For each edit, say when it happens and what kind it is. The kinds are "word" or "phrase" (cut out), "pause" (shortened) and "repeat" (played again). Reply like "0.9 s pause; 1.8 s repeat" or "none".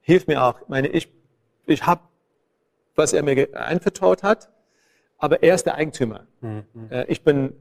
1.6 s word